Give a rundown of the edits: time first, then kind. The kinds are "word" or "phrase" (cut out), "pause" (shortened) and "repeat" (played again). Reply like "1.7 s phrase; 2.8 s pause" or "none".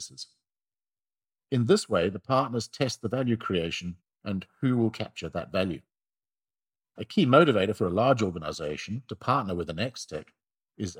none